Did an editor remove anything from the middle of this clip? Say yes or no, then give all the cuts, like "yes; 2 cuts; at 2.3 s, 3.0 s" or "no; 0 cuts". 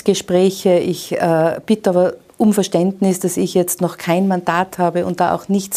no; 0 cuts